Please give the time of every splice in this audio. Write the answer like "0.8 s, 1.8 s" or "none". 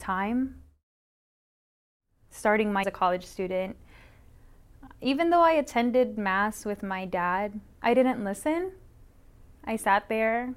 2.8 s